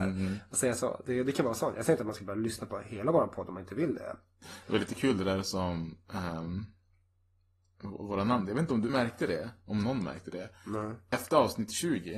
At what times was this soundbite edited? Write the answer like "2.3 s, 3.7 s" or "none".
8.9 s

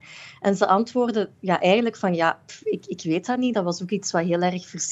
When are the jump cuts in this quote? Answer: none

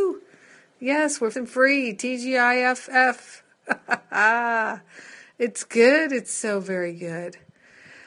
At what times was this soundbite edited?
1.3 s

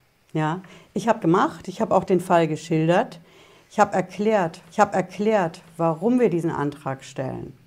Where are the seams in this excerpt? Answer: 1.2 s, 4.7 s

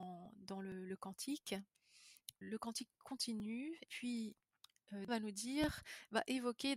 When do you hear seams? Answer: 2.4 s, 3.9 s, 5.1 s

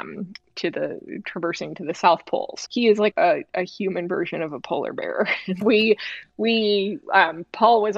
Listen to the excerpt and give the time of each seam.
2.7 s, 3.1 s, 5.6 s

